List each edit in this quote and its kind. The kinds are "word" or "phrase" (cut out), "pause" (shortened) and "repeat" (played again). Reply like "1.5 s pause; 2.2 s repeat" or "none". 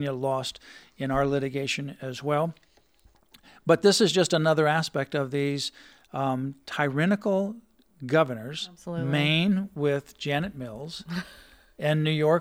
none